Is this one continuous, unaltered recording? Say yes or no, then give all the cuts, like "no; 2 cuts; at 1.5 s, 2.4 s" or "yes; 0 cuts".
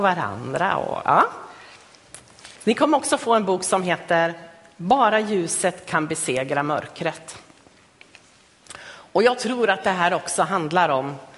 no; 1 cut; at 2.6 s